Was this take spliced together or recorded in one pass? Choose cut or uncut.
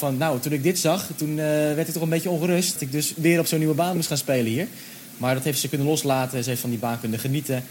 cut